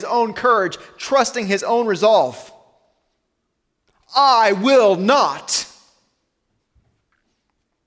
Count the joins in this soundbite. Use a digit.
0